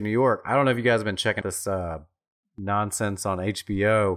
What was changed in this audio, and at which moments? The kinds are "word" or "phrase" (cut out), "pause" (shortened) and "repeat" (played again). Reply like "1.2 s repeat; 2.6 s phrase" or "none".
1.4 s word